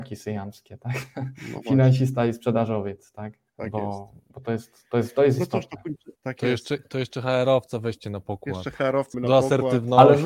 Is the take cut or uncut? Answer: cut